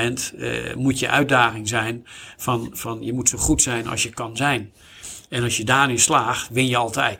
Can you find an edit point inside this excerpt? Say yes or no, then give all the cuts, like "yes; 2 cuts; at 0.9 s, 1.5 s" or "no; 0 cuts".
no; 0 cuts